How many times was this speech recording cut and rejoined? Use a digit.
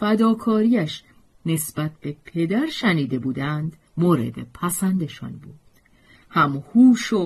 1